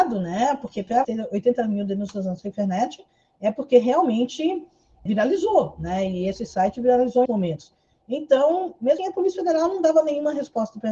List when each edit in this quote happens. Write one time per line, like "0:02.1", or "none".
0:01.0
0:05.1
0:07.3
0:09.0